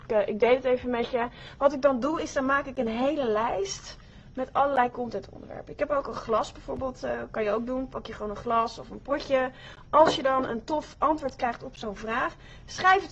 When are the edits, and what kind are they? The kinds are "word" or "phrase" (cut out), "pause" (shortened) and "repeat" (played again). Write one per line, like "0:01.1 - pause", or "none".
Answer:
none